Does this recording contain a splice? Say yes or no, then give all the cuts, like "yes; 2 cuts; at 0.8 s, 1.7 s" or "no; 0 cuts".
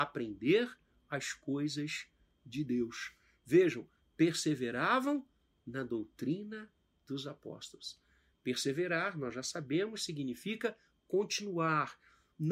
no; 0 cuts